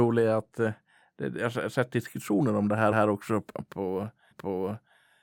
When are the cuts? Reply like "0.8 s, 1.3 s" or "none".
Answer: 2.9 s, 4.3 s